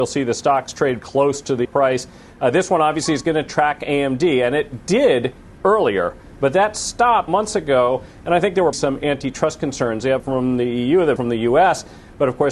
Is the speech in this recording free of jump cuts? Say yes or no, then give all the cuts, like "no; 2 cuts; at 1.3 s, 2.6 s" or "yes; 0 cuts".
no; 6 cuts; at 1.0 s, 1.6 s, 7.3 s, 8.7 s, 10.2 s, 11.2 s